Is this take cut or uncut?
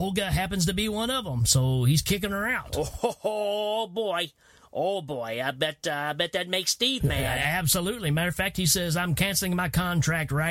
uncut